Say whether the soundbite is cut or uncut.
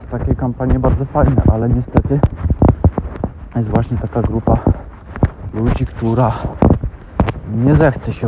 uncut